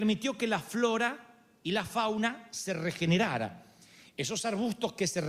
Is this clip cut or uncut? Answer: uncut